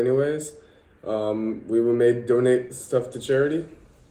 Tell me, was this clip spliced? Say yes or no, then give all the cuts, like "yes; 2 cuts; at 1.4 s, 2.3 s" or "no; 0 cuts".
no; 0 cuts